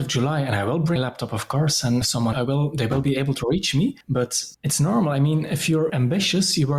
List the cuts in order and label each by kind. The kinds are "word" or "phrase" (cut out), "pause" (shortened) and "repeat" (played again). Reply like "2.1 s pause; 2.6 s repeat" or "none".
1.0 s word; 2.0 s word; 2.3 s phrase; 4.5 s pause; 5.9 s word

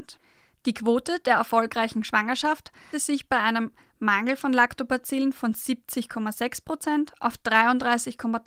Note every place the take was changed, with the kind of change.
2.9 s word

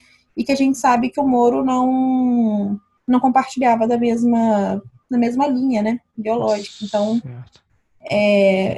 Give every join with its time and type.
none

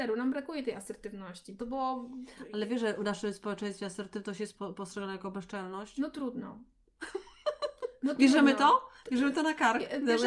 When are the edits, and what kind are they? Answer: 1.6 s word

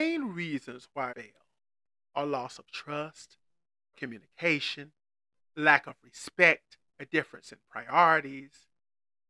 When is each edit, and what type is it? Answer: 1.1 s word; 3.9 s word; 6.9 s pause

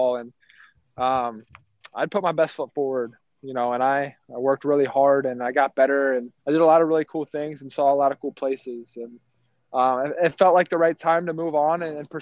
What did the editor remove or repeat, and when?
6.4 s pause

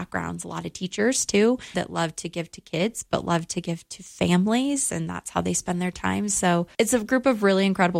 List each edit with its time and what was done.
1.7 s word; 6.7 s pause

